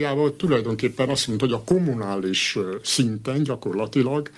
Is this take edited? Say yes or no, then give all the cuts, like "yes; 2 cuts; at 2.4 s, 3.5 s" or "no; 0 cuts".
no; 0 cuts